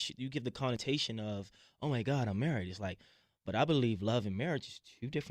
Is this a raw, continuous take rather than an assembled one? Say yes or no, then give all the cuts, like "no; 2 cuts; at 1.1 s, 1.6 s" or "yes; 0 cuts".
yes; 0 cuts